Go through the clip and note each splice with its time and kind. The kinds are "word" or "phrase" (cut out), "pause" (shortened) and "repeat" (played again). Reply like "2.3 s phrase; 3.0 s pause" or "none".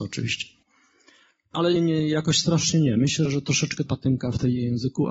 1.8 s word; 3.9 s phrase